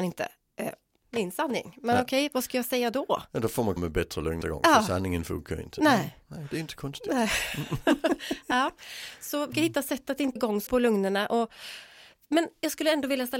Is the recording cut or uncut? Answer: cut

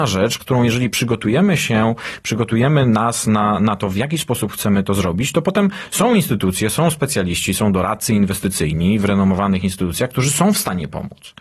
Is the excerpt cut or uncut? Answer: uncut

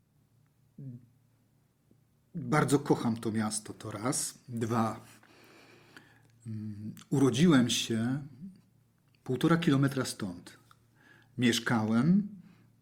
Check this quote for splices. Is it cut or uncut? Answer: uncut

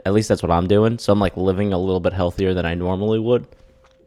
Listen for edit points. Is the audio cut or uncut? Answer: uncut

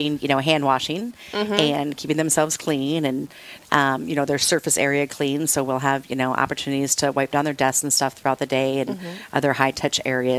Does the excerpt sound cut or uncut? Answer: uncut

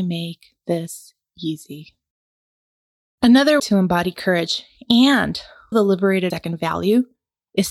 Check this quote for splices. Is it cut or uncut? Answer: cut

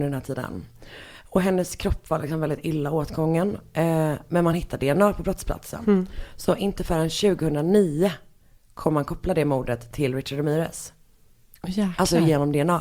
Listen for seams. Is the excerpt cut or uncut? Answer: uncut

